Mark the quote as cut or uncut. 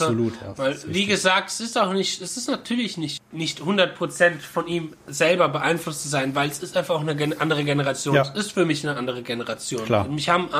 cut